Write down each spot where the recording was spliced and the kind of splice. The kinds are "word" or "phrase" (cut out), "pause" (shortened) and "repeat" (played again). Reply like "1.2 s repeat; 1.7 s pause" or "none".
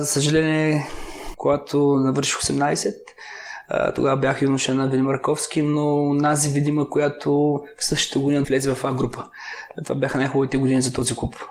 8.4 s word